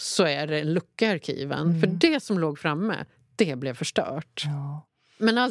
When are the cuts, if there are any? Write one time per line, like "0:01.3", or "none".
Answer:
none